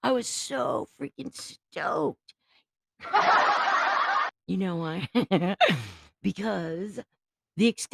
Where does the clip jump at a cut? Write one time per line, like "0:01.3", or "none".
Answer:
none

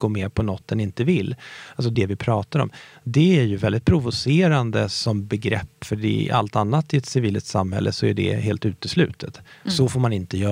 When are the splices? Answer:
0:01.9
0:05.8

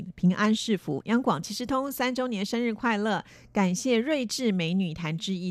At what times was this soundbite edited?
none

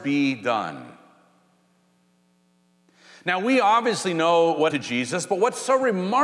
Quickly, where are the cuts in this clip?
0:04.7

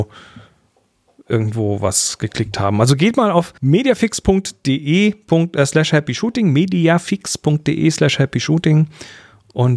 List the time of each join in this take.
0:03.6

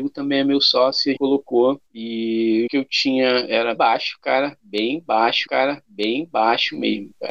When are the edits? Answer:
0:01.2
0:01.9
0:02.7
0:03.8
0:05.5

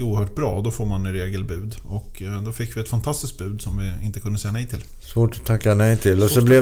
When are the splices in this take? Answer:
none

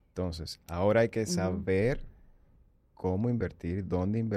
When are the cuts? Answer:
none

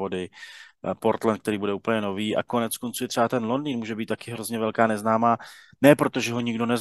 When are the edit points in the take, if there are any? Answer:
none

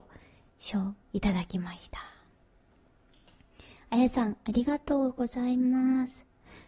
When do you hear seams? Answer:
0:01.0

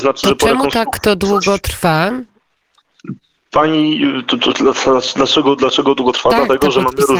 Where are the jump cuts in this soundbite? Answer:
none

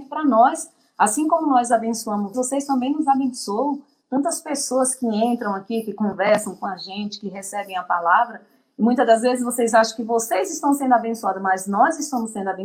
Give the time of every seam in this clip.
0:02.3

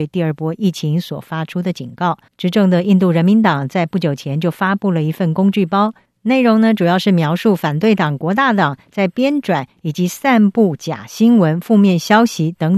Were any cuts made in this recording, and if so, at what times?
0:02.3

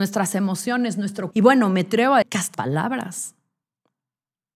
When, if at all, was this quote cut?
0:01.3
0:02.2
0:02.5

